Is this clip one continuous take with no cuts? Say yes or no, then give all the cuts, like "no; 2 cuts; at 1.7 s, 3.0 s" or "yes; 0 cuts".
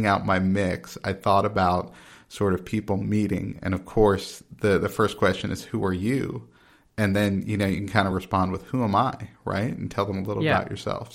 yes; 0 cuts